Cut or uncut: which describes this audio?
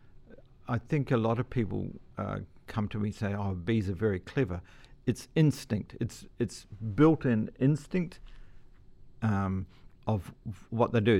cut